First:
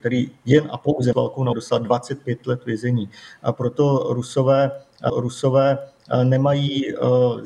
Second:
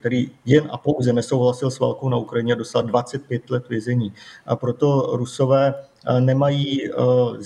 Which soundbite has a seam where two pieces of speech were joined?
first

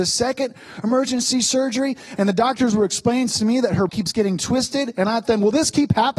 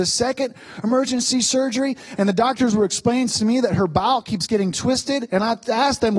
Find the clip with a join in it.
first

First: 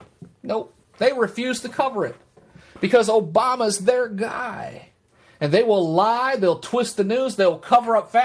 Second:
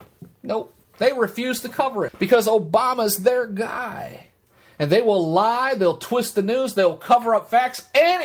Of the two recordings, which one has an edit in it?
second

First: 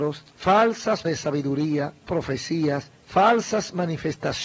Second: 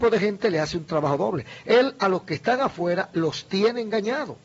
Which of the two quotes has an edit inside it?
first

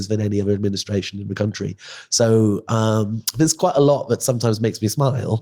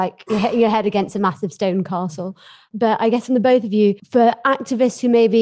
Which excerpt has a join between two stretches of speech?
second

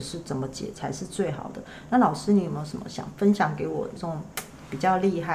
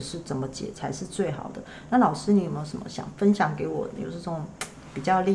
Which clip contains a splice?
first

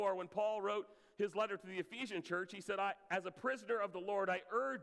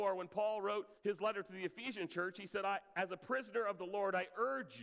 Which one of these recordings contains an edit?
second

